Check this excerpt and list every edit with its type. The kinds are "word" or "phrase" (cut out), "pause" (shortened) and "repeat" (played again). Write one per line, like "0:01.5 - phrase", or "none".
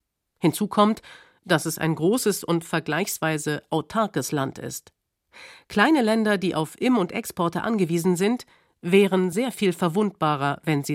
none